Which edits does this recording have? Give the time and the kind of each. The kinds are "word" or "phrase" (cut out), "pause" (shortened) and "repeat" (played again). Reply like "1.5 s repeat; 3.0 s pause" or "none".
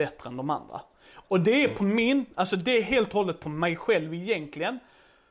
none